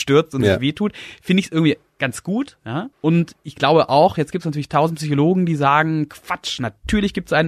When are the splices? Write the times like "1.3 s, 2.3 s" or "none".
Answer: 2.9 s

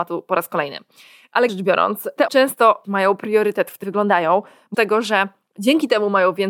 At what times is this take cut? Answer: 1.5 s, 2.3 s, 2.8 s, 3.8 s, 4.7 s

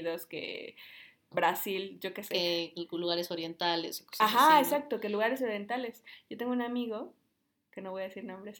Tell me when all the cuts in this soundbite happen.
1.3 s

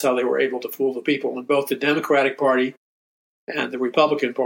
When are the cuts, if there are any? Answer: none

